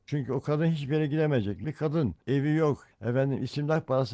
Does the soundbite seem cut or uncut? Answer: cut